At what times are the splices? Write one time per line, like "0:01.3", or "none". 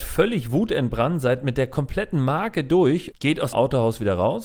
0:03.1
0:03.5